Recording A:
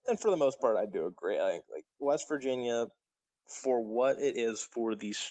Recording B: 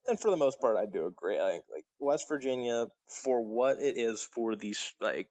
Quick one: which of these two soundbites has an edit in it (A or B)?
B